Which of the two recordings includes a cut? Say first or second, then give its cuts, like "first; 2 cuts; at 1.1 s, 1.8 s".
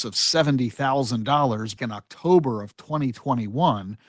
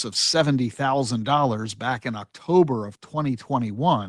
first; 1 cut; at 1.8 s